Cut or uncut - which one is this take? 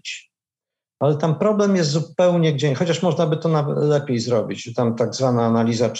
uncut